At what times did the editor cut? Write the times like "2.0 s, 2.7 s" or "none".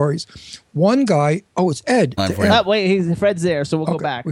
2.2 s